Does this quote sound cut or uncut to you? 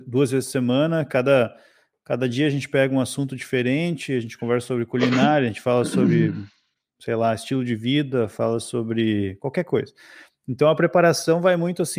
uncut